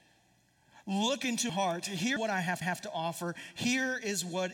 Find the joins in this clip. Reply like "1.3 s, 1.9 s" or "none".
1.5 s, 2.2 s, 2.6 s